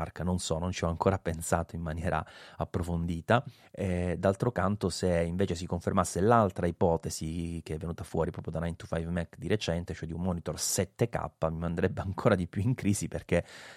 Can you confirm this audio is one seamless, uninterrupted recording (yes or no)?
yes